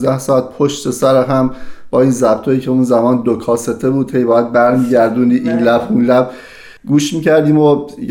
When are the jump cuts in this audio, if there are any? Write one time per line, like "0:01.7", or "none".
0:06.8